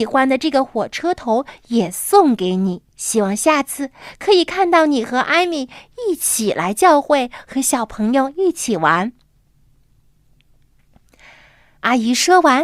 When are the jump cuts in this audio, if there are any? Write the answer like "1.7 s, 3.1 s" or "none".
2.9 s